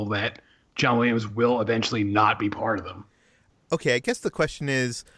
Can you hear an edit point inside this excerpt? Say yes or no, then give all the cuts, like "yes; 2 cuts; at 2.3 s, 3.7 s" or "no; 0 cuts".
no; 0 cuts